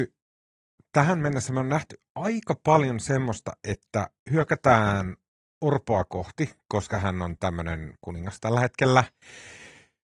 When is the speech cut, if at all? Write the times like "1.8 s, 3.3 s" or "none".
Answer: 8.0 s